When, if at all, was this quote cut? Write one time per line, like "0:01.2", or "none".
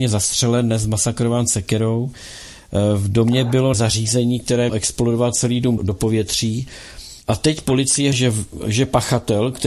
0:03.7
0:04.7
0:05.8
0:07.2
0:08.1